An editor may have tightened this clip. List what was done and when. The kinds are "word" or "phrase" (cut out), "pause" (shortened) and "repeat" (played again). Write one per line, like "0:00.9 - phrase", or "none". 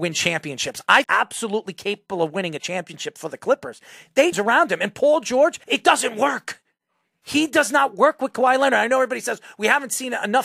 0:01.0 - phrase
0:04.3 - phrase
0:05.6 - pause